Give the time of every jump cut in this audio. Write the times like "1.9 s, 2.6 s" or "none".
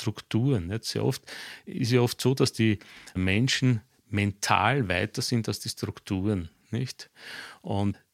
none